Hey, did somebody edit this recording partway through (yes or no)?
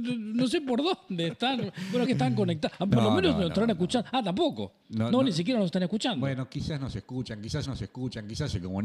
yes